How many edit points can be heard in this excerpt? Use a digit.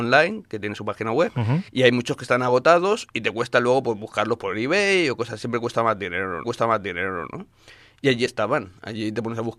2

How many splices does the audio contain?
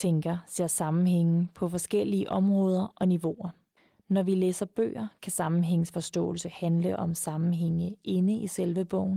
1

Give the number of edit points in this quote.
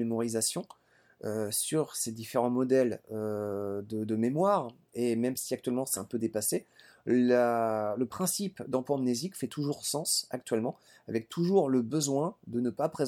0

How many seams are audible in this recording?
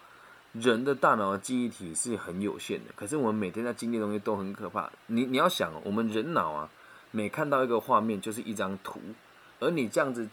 0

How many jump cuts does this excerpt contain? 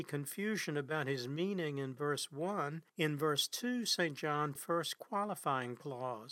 2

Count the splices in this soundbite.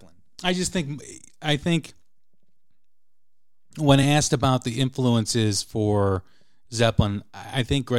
0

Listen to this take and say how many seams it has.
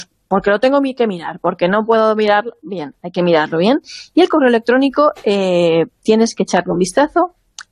0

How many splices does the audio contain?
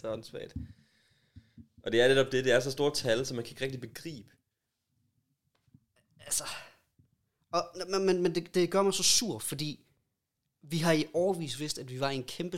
0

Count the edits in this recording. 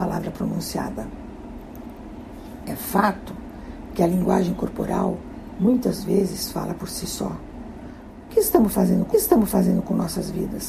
1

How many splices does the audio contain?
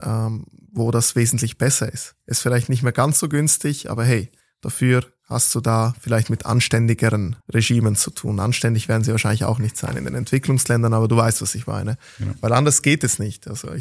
3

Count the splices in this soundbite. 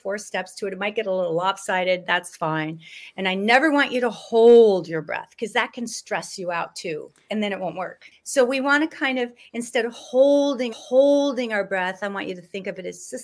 1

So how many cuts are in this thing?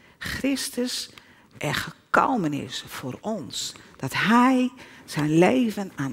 0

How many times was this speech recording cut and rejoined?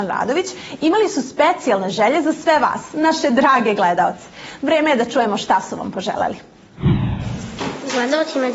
0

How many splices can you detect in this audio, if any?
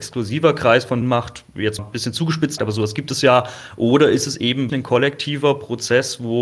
4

